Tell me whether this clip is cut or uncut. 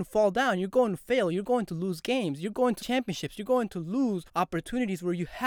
cut